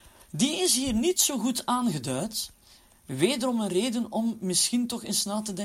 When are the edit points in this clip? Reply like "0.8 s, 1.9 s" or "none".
none